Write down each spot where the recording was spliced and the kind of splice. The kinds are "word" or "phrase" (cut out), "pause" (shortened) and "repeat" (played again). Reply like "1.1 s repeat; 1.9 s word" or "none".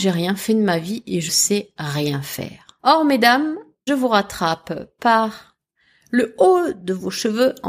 1.3 s word; 2.8 s pause; 3.9 s word

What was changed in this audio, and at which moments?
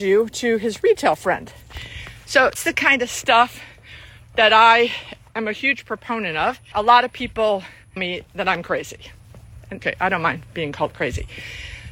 2.6 s word; 5.3 s word; 6.7 s word; 8.0 s word; 9.8 s word

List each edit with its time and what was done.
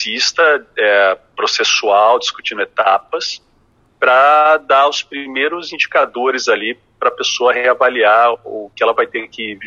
none

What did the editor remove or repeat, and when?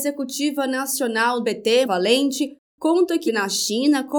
1.4 s word; 1.8 s word; 3.3 s word

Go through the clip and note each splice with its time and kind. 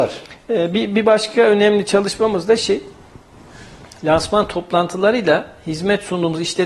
none

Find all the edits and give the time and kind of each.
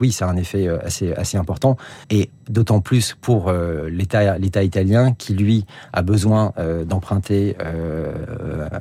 2.0 s pause

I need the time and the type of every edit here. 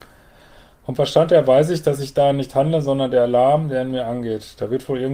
none

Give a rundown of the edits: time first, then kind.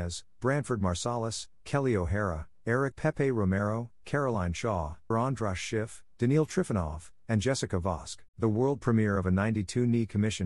2.9 s word; 5.1 s word; 8.3 s pause

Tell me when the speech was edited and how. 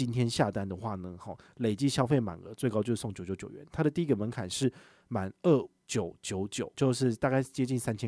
6.7 s word

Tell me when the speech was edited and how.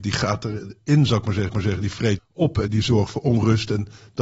1.5 s repeat; 2.2 s word; 2.7 s word

